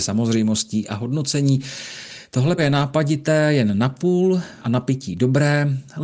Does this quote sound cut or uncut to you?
cut